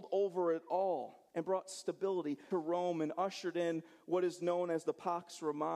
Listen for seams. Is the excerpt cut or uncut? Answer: cut